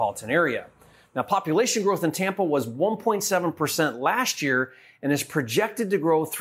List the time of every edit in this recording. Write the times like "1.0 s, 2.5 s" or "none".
none